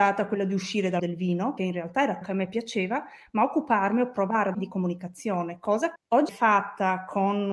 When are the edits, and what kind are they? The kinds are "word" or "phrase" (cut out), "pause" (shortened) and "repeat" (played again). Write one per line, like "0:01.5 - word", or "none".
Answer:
0:01.0 - word
0:01.6 - word
0:02.2 - word
0:04.5 - word
0:06.0 - word
0:06.3 - word